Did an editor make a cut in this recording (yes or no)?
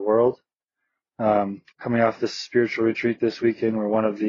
yes